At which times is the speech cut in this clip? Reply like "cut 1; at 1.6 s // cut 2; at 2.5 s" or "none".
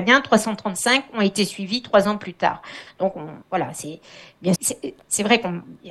cut 1; at 3.4 s // cut 2; at 4.6 s